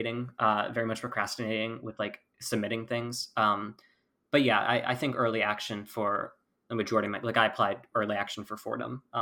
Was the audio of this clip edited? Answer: no; 0 cuts

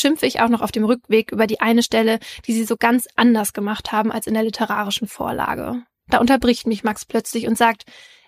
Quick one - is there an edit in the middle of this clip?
no; 0 cuts

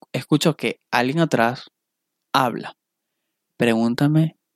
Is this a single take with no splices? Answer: yes; 0 cuts

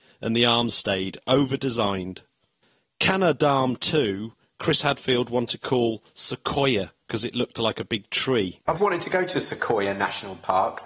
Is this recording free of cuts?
no; 1 cut; at 8.8 s

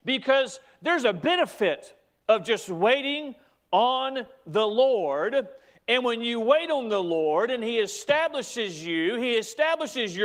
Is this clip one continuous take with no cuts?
yes; 0 cuts

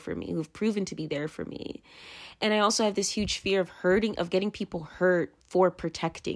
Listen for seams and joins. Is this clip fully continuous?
no; 1 cut; at 5.4 s

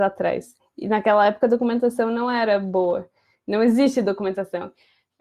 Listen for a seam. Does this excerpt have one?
no; 0 cuts

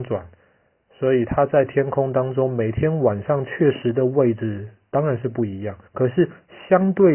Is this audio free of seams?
no; 1 cut; at 5.9 s

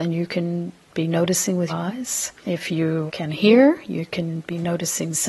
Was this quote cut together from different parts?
yes; 3 cuts; at 1.7 s, 2.4 s, 3.1 s

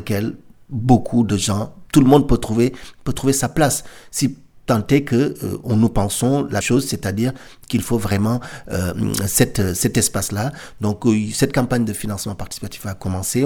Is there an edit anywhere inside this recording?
yes; 1 cut; at 6.6 s

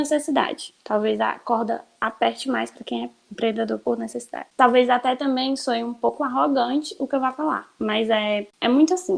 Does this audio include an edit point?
no; 0 cuts

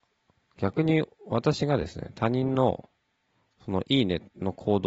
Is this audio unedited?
yes; 0 cuts

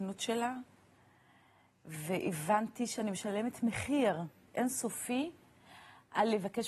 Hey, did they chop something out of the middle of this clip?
yes; 1 cut; at 4.5 s

